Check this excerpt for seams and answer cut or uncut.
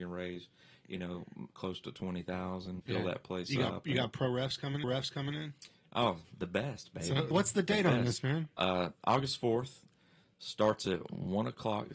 cut